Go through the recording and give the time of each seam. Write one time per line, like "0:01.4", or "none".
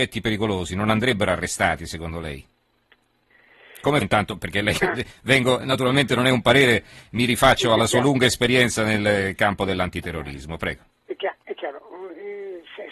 0:04.0